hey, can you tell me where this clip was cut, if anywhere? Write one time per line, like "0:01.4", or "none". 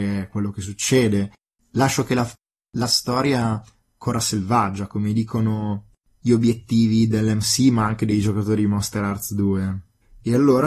none